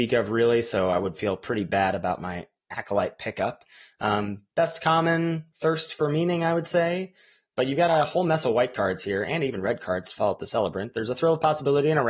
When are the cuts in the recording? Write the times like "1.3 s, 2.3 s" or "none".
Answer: none

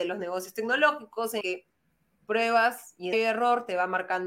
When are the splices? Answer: 1.4 s, 2.2 s, 3.1 s

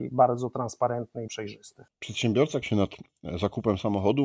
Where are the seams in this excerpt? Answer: 1.3 s, 2.6 s

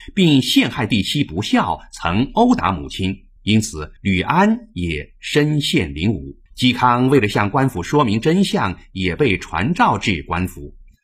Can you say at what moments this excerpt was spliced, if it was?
3.4 s, 4.0 s, 6.5 s

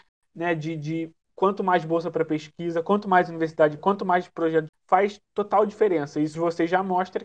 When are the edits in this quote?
1.2 s, 3.8 s, 4.7 s, 5.2 s, 6.3 s

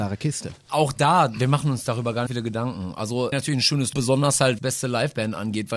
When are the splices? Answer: 2.3 s, 3.3 s, 3.9 s, 4.6 s

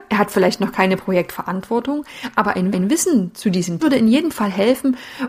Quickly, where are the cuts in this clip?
2.7 s, 3.8 s

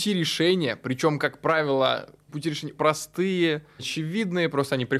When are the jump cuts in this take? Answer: 2.3 s, 2.8 s, 3.8 s

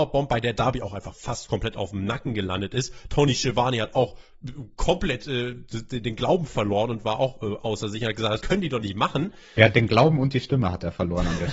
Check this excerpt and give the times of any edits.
none

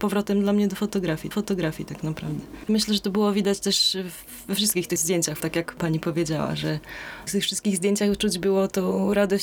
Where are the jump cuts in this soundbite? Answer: 1.3 s, 5.4 s, 7.3 s

